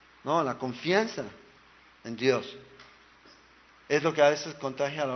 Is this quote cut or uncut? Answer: uncut